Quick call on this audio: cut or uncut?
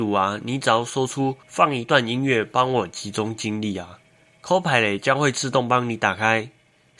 cut